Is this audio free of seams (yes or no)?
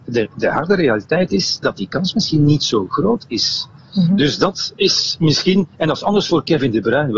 yes